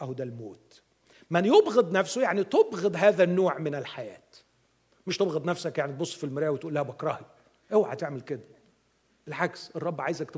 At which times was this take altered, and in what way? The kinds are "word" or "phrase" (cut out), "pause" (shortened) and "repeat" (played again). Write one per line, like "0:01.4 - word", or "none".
none